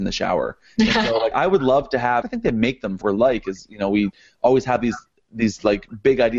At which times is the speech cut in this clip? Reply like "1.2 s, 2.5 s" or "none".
1.3 s, 2.2 s, 3.0 s